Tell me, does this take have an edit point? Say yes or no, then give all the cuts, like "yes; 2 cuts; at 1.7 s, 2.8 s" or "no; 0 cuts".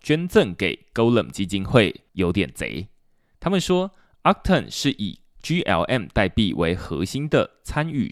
yes; 1 cut; at 2.1 s